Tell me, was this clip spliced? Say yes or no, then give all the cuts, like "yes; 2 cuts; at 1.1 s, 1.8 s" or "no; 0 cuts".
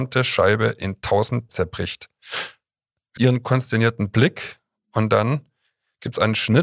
yes; 2 cuts; at 1.5 s, 3.2 s